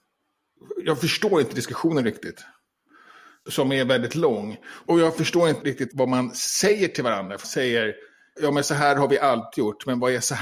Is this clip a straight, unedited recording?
no; 2 cuts; at 5.6 s, 7.4 s

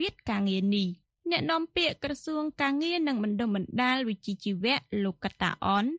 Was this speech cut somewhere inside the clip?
no; 0 cuts

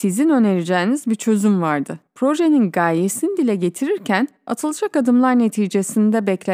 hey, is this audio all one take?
no; 2 cuts; at 2.1 s, 4.4 s

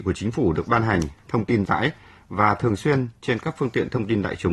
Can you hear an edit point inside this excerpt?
yes; 1 cut; at 1.7 s

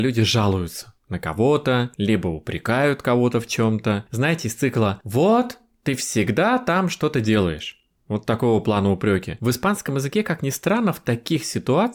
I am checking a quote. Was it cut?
yes; 1 cut; at 1.0 s

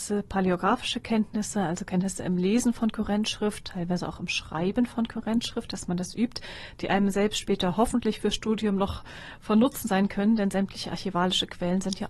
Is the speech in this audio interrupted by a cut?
no; 0 cuts

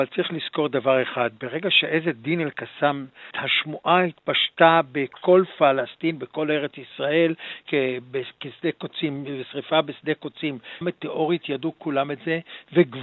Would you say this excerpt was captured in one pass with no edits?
no; 3 cuts; at 3.3 s, 7.7 s, 10.8 s

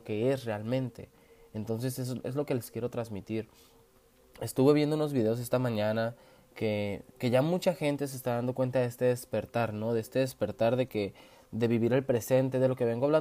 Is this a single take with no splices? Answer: yes; 0 cuts

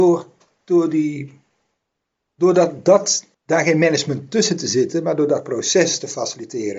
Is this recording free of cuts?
no; 2 cuts; at 2.1 s, 3.3 s

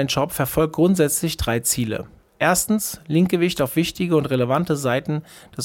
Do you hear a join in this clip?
no; 0 cuts

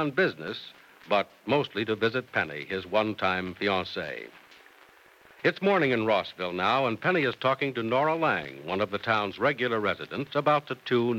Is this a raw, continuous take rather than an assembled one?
yes; 0 cuts

